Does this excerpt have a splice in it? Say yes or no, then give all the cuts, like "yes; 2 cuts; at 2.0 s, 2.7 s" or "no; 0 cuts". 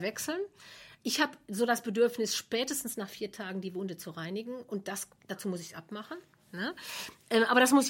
no; 0 cuts